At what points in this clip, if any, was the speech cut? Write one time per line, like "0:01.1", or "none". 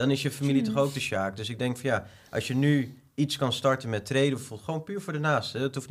none